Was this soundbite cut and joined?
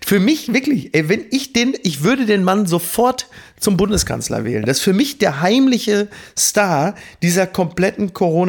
no; 0 cuts

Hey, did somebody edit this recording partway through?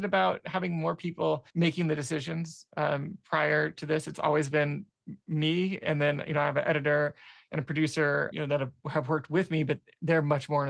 yes; 2 cuts; at 1.5 s, 8.3 s

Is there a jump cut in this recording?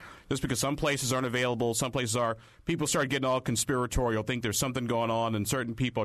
no; 0 cuts

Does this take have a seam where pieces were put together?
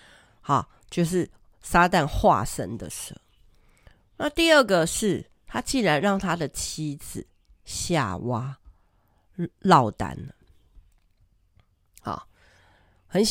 no; 0 cuts

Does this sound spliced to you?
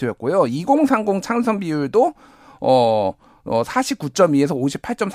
no; 0 cuts

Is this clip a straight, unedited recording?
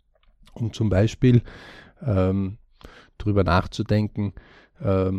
yes; 0 cuts

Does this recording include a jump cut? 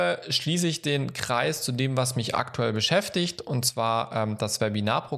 no; 0 cuts

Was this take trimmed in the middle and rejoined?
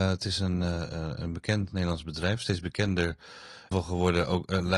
yes; 1 cut; at 3.7 s

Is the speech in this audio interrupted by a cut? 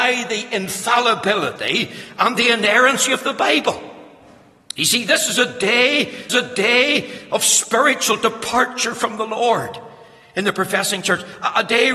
yes; 1 cut; at 6.3 s

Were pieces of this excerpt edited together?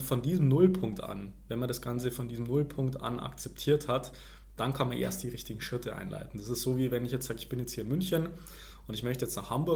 no; 0 cuts

